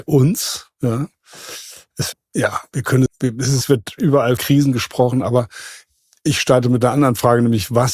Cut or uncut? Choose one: cut